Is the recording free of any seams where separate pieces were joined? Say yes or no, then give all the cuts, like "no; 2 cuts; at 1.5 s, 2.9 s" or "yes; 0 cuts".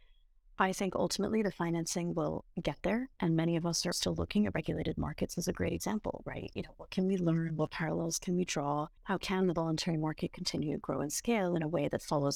no; 3 cuts; at 3.1 s, 3.9 s, 9.0 s